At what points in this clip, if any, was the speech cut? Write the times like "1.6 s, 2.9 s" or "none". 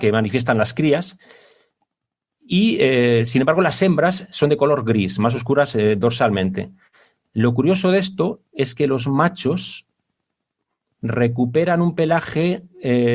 none